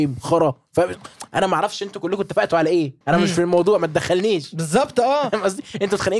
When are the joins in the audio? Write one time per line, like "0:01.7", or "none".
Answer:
0:03.0